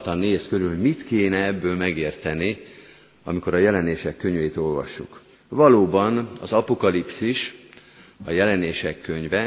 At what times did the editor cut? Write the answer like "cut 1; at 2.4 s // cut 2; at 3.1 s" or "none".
cut 1; at 5.3 s